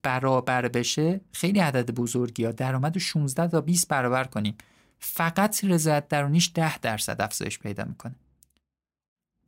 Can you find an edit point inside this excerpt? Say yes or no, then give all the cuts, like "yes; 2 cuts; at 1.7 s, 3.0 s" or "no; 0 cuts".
no; 0 cuts